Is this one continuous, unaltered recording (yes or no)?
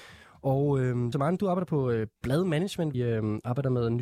no